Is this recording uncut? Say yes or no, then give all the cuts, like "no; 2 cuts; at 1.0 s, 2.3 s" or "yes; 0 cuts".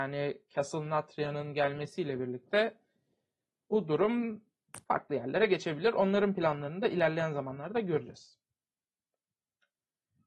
no; 1 cut; at 4.8 s